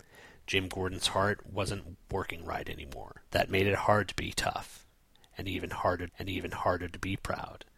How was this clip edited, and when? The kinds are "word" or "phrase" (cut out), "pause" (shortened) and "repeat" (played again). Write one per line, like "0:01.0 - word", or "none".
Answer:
0:03.3 - pause
0:06.1 - repeat